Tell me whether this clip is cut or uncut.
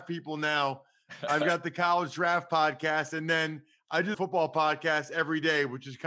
cut